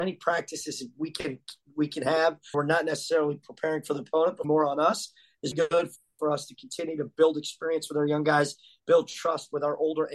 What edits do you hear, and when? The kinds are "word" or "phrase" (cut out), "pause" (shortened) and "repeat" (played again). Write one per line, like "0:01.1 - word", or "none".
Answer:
0:02.5 - word
0:04.4 - word
0:05.5 - word